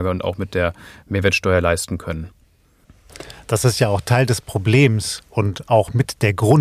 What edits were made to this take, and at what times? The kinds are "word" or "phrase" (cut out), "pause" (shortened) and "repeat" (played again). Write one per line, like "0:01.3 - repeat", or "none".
none